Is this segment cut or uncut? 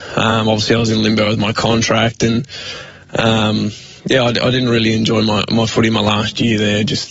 cut